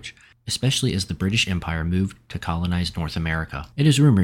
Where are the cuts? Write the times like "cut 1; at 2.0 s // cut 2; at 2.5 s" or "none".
none